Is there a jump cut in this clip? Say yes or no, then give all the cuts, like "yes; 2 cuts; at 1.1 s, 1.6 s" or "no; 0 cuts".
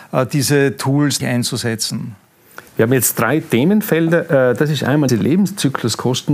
yes; 3 cuts; at 1.2 s, 2.7 s, 5.1 s